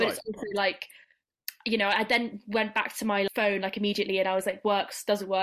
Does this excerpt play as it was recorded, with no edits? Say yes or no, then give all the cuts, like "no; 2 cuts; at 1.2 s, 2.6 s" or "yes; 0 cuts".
yes; 0 cuts